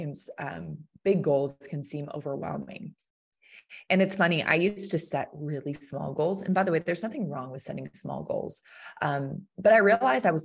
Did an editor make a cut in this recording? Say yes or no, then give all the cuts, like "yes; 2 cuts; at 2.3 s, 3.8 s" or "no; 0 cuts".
no; 0 cuts